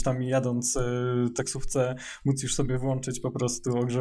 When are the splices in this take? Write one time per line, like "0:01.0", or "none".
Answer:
none

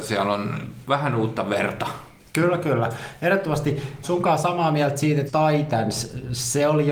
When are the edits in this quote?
0:04.0
0:05.3

